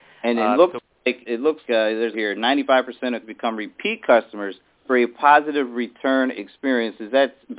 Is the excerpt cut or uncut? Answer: cut